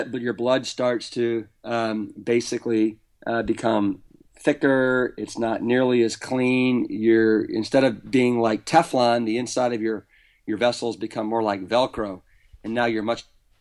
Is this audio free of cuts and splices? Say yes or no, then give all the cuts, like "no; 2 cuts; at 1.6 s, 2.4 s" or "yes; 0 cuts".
yes; 0 cuts